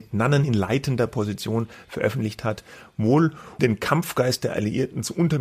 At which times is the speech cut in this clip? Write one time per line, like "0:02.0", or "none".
0:03.6